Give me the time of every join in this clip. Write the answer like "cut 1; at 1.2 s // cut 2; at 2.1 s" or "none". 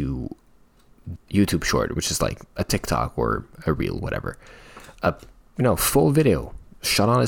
cut 1; at 1.2 s // cut 2; at 4.9 s

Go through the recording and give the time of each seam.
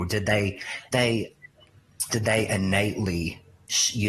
cut 1; at 0.9 s // cut 2; at 2.1 s

